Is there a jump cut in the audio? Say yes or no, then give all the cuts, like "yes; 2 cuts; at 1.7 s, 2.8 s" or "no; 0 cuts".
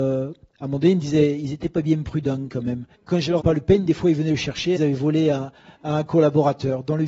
yes; 3 cuts; at 2.9 s, 3.4 s, 4.8 s